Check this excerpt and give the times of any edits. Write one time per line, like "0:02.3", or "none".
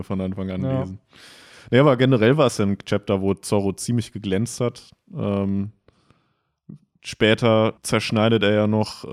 0:07.8